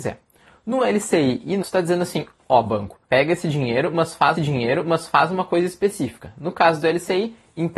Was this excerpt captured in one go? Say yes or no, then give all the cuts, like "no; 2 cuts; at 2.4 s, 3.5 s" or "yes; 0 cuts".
no; 3 cuts; at 1.6 s, 3.0 s, 4.4 s